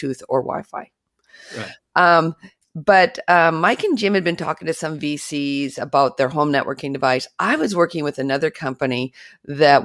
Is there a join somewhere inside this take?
no; 0 cuts

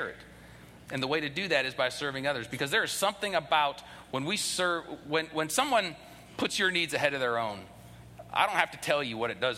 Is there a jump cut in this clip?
no; 0 cuts

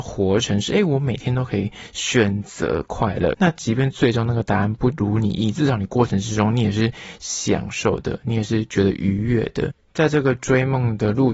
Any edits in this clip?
yes; 1 cut; at 3.3 s

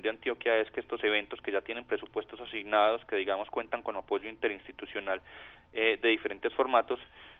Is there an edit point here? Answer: no; 0 cuts

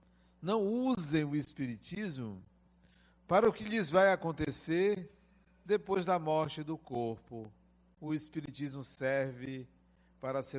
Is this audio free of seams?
yes; 0 cuts

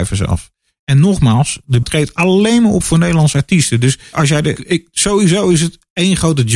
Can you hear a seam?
yes; 3 cuts; at 1.8 s, 4.1 s, 4.6 s

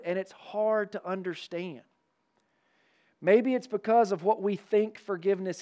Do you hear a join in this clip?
no; 0 cuts

